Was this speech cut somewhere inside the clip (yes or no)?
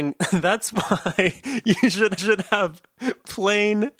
yes